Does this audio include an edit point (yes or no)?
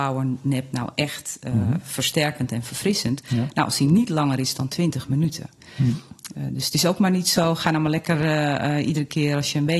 no